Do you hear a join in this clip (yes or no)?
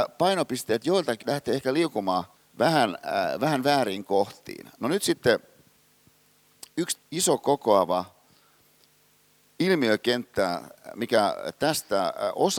yes